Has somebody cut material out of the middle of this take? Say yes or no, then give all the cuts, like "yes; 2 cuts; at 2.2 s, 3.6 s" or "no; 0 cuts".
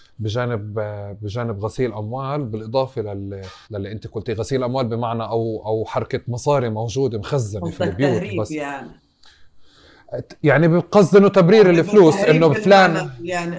yes; 1 cut; at 3.6 s